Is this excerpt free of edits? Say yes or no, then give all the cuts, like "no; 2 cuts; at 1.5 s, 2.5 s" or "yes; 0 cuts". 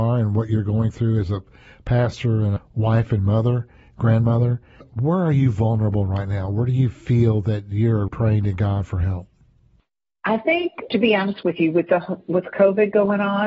no; 3 cuts; at 2.6 s, 8.1 s, 10.9 s